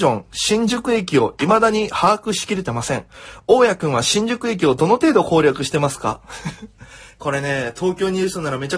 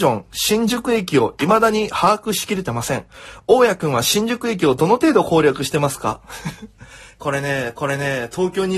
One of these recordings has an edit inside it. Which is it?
second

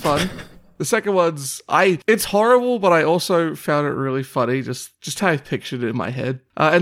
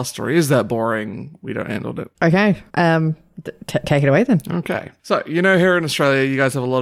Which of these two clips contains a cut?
second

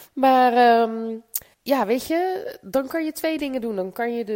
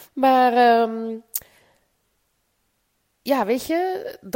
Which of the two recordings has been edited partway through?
first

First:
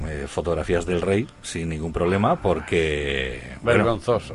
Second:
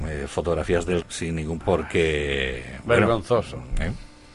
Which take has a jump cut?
second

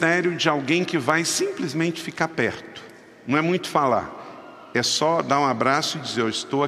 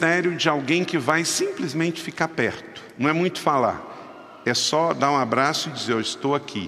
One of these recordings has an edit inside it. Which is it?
second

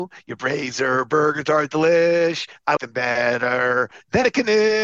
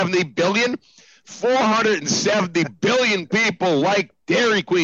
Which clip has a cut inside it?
first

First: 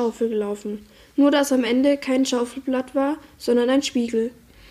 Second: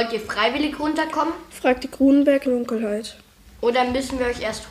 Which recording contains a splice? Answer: second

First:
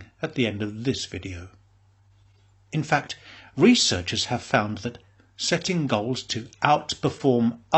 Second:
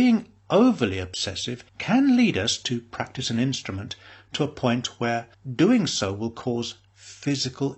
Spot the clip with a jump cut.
second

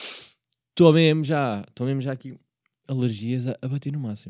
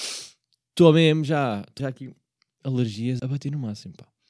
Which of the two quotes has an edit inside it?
second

